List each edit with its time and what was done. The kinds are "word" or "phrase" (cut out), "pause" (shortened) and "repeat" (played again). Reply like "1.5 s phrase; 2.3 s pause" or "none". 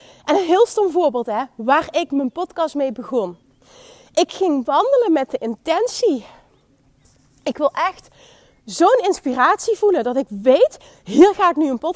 none